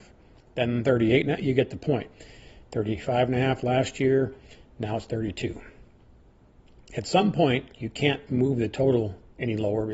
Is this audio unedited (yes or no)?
yes